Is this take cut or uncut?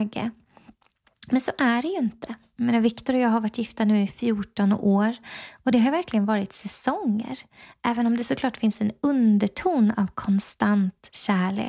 uncut